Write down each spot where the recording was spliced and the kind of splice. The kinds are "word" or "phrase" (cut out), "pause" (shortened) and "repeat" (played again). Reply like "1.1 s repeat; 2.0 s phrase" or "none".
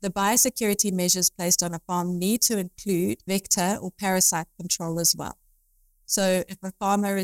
none